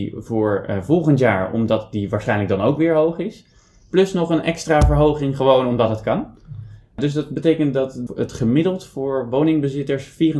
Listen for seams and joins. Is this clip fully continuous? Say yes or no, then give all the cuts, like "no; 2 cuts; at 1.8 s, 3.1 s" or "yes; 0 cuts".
yes; 0 cuts